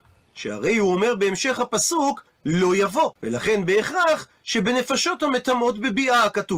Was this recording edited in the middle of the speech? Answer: yes; 1 cut; at 3.2 s

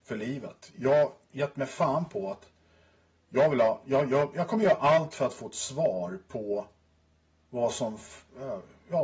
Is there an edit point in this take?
no; 0 cuts

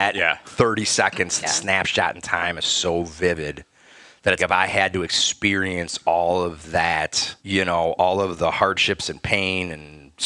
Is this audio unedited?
no; 3 cuts; at 1.4 s, 4.4 s, 7.4 s

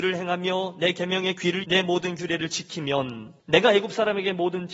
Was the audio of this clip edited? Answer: yes; 2 cuts; at 1.6 s, 3.4 s

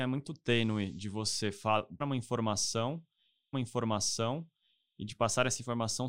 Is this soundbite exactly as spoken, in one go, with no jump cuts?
no; 2 cuts; at 2.0 s, 3.5 s

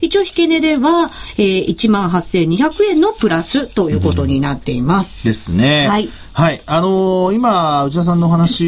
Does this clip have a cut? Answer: no; 0 cuts

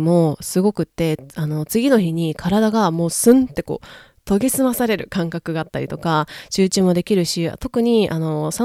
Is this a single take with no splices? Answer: yes; 0 cuts

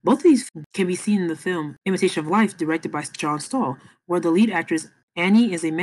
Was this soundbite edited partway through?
no; 0 cuts

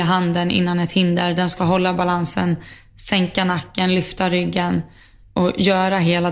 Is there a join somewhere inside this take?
no; 0 cuts

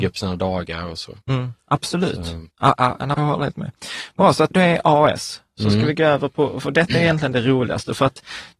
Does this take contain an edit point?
yes; 4 cuts; at 1.2 s, 2.5 s, 3.1 s, 4.5 s

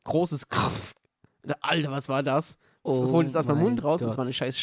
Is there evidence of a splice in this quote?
no; 0 cuts

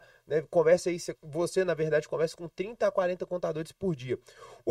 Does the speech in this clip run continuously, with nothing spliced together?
no; 1 cut; at 1.2 s

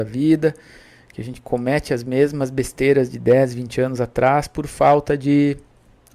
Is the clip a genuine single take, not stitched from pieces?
yes; 0 cuts

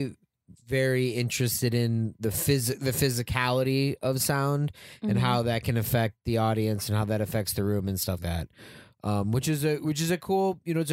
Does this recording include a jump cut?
yes; 1 cut; at 8.2 s

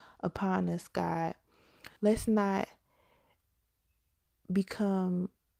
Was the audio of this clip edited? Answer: yes; 1 cut; at 2.0 s

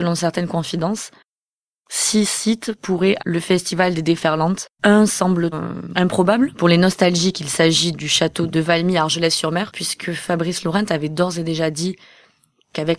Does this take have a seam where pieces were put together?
yes; 4 cuts; at 3.2 s, 5.5 s, 7.9 s, 8.5 s

